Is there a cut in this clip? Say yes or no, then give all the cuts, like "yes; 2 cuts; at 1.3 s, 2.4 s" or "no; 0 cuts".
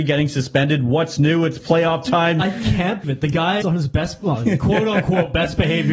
yes; 2 cuts; at 3.0 s, 3.6 s